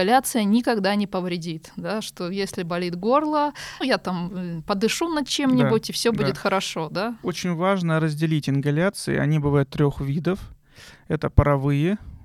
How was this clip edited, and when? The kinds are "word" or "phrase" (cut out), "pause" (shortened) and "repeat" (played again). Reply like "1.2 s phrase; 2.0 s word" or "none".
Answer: 3.8 s word